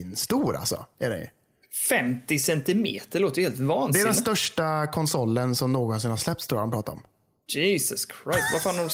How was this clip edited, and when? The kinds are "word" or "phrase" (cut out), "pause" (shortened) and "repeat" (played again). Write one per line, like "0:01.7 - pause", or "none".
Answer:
none